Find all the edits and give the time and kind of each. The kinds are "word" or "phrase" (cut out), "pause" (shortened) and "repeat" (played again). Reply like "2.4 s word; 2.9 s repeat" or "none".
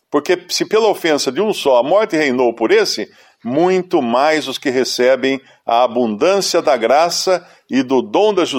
none